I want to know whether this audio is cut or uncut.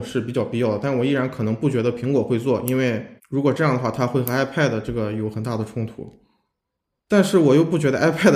cut